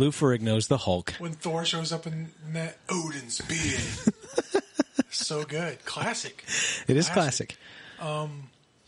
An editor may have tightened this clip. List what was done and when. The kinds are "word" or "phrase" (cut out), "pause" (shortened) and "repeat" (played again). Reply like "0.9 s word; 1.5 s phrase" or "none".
none